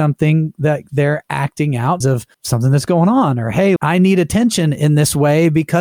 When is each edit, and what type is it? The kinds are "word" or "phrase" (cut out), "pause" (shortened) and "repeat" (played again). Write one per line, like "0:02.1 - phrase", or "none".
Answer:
0:02.0 - word
0:02.3 - pause
0:03.8 - word